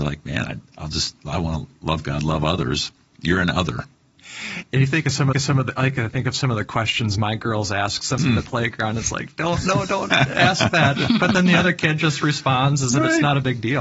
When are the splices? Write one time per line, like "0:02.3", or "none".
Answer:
0:05.3
0:08.2